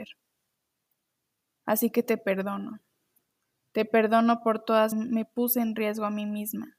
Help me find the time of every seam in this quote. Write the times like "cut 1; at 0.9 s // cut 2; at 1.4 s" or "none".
cut 1; at 4.9 s

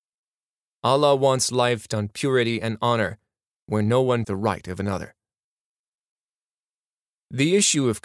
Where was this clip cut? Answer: cut 1; at 1.9 s // cut 2; at 4.2 s

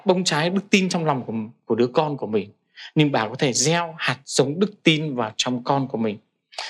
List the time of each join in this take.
none

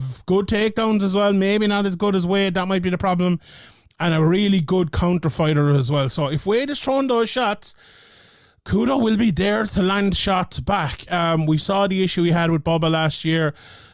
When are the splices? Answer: none

